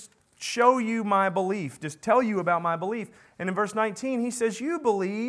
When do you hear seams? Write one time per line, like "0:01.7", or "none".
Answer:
none